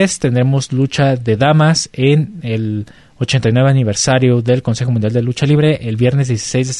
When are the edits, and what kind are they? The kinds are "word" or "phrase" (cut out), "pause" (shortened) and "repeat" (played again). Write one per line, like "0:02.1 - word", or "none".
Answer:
none